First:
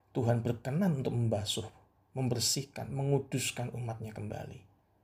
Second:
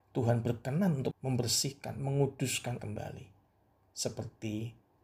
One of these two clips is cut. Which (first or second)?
second